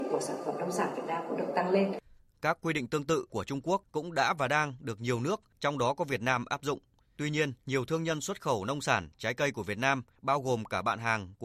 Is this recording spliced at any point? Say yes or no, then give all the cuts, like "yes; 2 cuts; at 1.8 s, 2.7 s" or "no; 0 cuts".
no; 0 cuts